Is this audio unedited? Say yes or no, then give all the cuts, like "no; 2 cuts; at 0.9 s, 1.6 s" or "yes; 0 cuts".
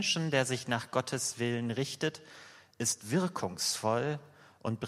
yes; 0 cuts